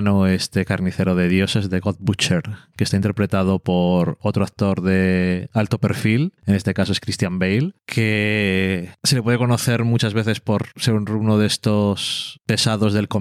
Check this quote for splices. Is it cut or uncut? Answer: uncut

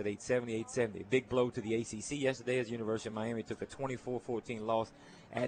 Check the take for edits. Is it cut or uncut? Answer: uncut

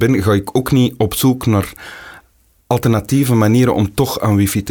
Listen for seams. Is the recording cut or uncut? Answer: uncut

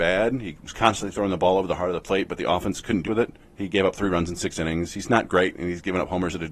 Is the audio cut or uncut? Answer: cut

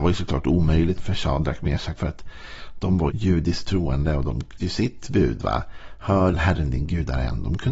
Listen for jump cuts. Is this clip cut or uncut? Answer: cut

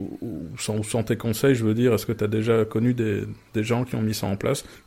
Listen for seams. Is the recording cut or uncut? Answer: uncut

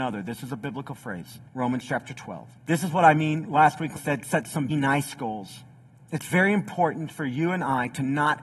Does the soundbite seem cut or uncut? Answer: cut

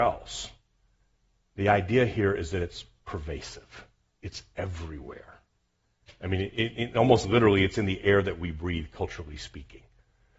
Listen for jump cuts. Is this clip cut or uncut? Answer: uncut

